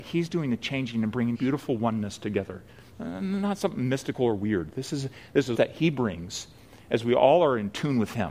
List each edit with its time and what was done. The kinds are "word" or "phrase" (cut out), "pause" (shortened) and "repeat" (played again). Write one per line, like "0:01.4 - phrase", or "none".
0:01.3 - word
0:05.5 - word